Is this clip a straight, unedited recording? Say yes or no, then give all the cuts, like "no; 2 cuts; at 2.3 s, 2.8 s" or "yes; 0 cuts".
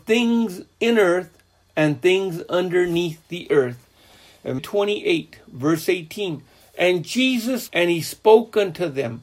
no; 3 cuts; at 4.6 s, 6.6 s, 7.7 s